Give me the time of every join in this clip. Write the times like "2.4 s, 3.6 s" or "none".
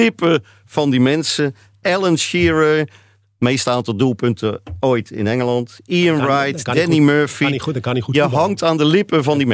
none